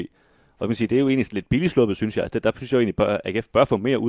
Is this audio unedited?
yes; 0 cuts

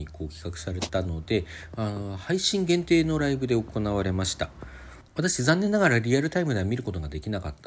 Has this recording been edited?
yes; 1 cut; at 5.1 s

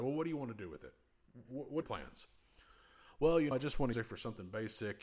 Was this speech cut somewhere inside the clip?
yes; 3 cuts; at 1.8 s, 3.5 s, 3.9 s

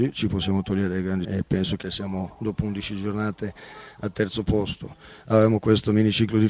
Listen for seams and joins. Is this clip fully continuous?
no; 2 cuts; at 1.2 s, 1.8 s

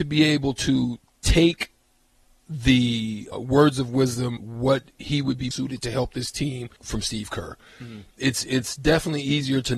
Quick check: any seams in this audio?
yes; 4 cuts; at 3.3 s, 4.4 s, 5.5 s, 6.8 s

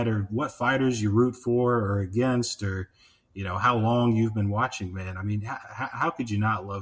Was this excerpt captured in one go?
yes; 0 cuts

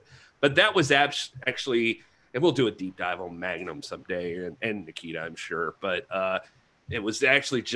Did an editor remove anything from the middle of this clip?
no; 0 cuts

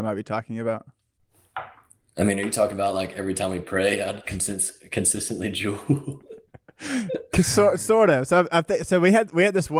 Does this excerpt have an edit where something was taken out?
no; 0 cuts

